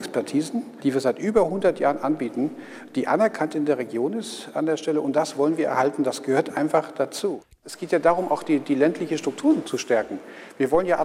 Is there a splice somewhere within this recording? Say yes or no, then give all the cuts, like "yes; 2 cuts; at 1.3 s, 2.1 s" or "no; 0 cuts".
no; 0 cuts